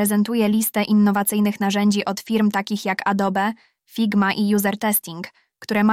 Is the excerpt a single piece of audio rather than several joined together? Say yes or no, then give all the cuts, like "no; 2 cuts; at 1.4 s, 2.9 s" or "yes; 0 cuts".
yes; 0 cuts